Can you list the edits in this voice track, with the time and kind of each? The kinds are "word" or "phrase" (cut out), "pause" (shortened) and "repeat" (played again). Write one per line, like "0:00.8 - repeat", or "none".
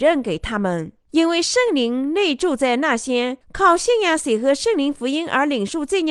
0:01.0 - pause